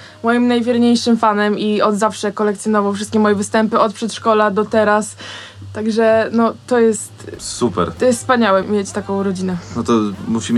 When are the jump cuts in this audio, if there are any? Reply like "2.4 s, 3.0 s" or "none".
8.6 s